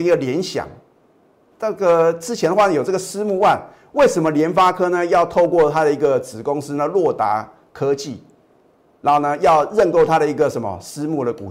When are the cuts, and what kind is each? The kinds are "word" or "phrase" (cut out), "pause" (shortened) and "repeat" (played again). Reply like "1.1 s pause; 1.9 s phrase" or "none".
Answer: 1.5 s word